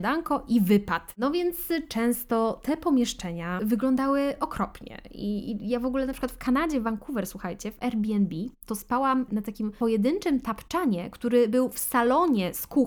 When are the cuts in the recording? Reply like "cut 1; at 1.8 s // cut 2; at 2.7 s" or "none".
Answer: none